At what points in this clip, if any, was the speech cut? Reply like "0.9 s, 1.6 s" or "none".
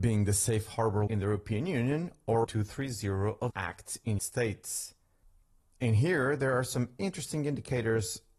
1.1 s, 2.4 s, 3.5 s, 4.2 s, 7.0 s